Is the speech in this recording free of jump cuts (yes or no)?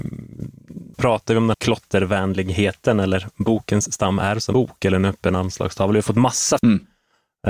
no